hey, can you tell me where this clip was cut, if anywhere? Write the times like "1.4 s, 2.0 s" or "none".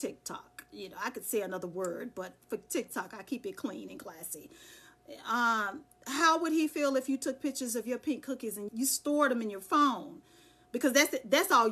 8.7 s